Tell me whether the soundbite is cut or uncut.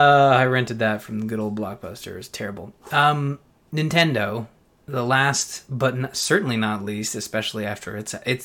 uncut